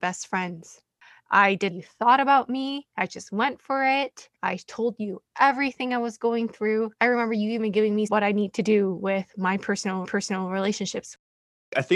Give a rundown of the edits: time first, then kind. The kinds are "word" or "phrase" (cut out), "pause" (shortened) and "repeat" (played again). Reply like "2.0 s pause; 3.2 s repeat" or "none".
1.7 s phrase; 4.3 s pause; 8.1 s phrase; 10.0 s repeat